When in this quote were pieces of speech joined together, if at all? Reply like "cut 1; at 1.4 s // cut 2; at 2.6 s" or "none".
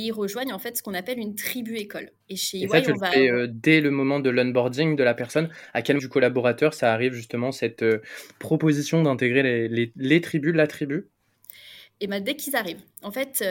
cut 1; at 2.2 s // cut 2; at 6.0 s